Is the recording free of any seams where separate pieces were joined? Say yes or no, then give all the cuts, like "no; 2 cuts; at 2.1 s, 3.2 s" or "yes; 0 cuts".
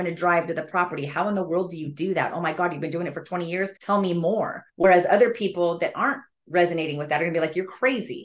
no; 2 cuts; at 3.8 s, 4.7 s